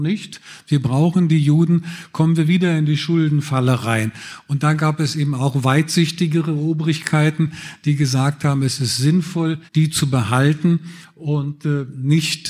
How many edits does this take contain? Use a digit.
1